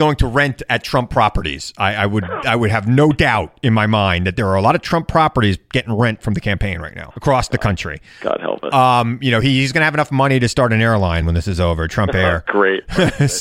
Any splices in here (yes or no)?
yes